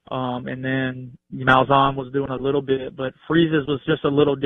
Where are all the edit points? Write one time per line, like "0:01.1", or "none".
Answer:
0:01.4